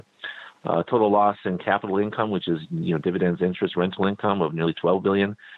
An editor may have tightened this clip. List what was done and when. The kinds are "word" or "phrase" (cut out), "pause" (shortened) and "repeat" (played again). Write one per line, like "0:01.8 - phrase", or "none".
none

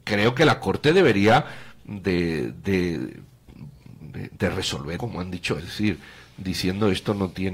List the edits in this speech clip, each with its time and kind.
0:04.0 - word
0:05.0 - word
0:05.6 - word

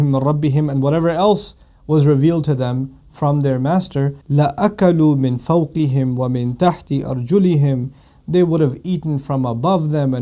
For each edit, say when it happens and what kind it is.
0:04.2 - pause

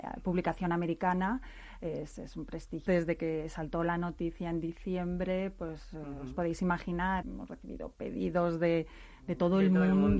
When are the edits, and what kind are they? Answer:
0:02.9 - word
0:07.2 - word

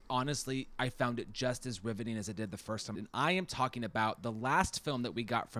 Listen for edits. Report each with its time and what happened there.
0:02.9 - phrase

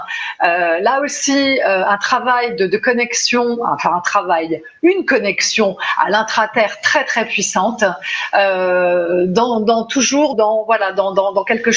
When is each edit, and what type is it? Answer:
0:10.3 - word

